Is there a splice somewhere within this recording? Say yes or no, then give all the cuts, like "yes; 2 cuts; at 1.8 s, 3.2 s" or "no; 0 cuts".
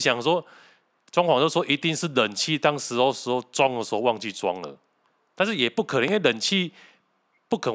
yes; 1 cut; at 5.1 s